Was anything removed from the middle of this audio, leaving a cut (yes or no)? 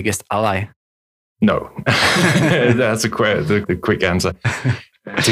no